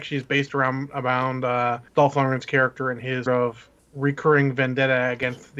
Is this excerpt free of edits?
no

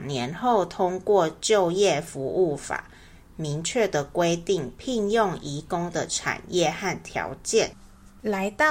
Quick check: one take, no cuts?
yes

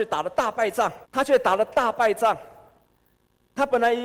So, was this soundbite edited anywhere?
yes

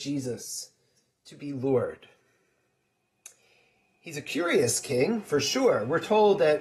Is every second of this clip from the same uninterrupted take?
yes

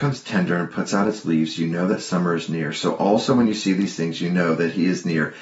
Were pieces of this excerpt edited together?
no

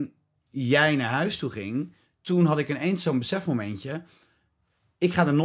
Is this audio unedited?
yes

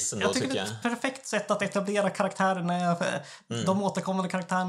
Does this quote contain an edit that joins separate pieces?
no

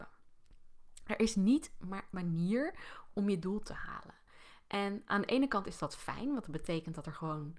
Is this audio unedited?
no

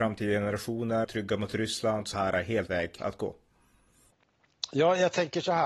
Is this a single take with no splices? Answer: no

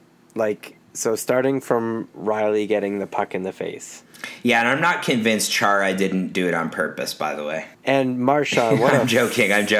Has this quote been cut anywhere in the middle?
yes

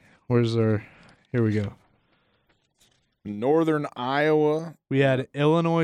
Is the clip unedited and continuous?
yes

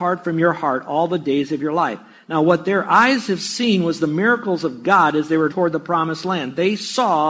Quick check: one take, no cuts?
no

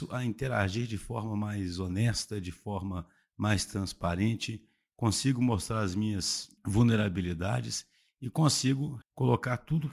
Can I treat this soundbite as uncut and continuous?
no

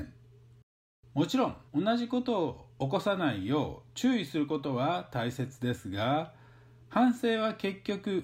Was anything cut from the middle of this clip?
yes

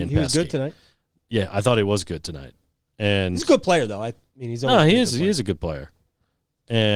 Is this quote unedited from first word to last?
yes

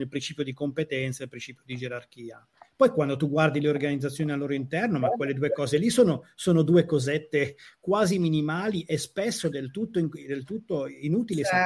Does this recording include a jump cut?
no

